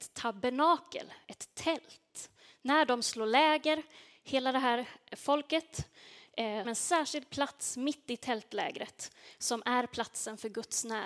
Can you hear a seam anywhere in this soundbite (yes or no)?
yes